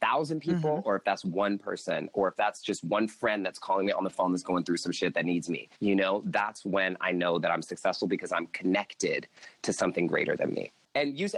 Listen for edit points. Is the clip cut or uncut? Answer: cut